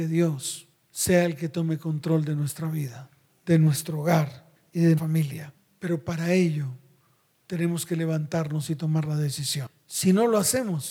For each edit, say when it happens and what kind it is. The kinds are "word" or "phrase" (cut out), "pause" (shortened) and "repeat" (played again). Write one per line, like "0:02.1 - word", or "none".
0:04.6 - pause
0:05.0 - word